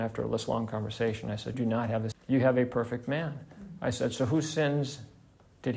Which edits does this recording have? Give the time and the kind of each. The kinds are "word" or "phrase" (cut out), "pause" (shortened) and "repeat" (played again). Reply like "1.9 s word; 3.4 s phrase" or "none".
1.5 s word; 2.1 s word